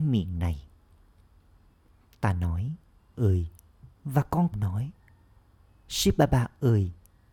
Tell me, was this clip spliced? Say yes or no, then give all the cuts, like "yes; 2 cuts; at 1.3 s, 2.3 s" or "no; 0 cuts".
yes; 3 cuts; at 3.1 s, 4.0 s, 4.5 s